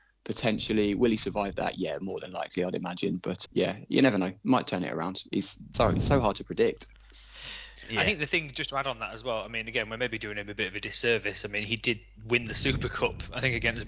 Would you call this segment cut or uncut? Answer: cut